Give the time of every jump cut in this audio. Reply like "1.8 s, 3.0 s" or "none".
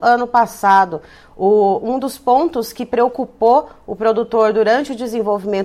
none